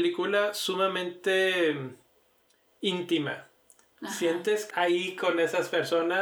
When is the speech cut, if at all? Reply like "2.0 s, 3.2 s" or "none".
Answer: 4.7 s